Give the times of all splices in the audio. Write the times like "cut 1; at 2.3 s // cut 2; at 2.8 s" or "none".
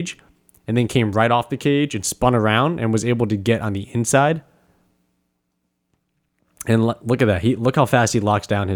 none

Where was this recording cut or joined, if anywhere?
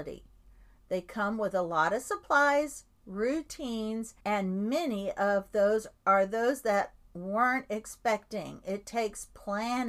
cut 1; at 4.2 s // cut 2; at 6.0 s

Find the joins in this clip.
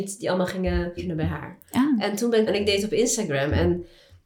cut 1; at 1.0 s // cut 2; at 2.5 s

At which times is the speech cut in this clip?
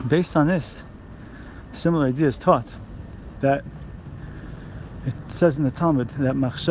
none

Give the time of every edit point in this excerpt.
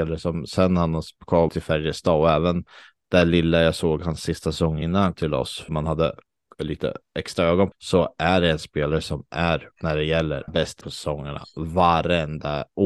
cut 1; at 1.5 s // cut 2; at 4.8 s // cut 3; at 5.1 s // cut 4; at 5.7 s // cut 5; at 7.7 s // cut 6; at 9.7 s // cut 7; at 10.5 s // cut 8; at 10.8 s

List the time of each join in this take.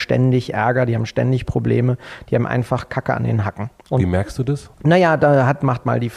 cut 1; at 4.7 s

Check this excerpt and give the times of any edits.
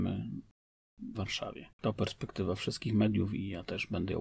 cut 1; at 1.2 s // cut 2; at 1.7 s

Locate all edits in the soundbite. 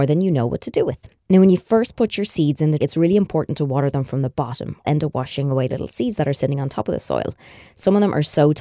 cut 1; at 2.8 s // cut 2; at 4.8 s // cut 3; at 5.7 s

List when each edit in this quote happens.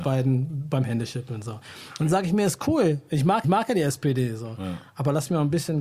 cut 1; at 3.4 s

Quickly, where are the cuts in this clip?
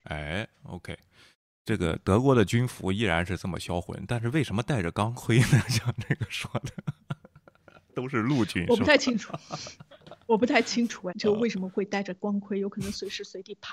cut 1; at 11.1 s

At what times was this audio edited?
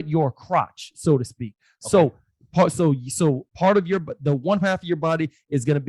none

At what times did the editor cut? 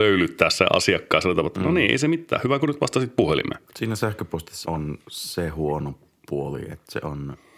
cut 1; at 3.7 s // cut 2; at 4.6 s // cut 3; at 5.0 s

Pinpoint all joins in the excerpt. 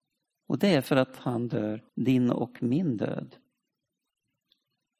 cut 1; at 1.9 s

